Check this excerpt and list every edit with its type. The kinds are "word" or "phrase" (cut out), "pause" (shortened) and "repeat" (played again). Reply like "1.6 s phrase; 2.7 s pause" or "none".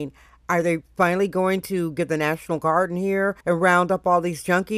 3.4 s pause